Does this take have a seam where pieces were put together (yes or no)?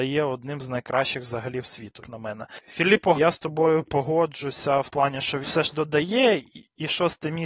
yes